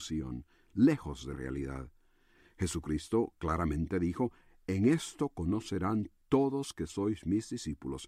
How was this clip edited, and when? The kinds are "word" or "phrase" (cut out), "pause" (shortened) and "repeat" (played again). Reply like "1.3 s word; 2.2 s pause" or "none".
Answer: 1.3 s word